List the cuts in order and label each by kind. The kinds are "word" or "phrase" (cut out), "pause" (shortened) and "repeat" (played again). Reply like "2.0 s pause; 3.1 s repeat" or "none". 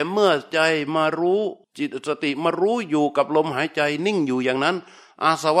1.6 s pause